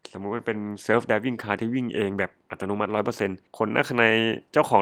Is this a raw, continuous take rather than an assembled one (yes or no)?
no